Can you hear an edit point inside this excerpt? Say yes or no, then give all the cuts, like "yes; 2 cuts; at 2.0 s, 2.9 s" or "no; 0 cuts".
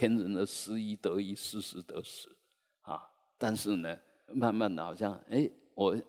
yes; 1 cut; at 4.3 s